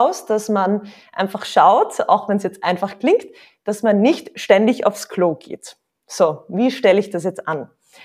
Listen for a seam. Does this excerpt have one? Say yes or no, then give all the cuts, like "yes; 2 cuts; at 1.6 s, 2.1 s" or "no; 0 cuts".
no; 0 cuts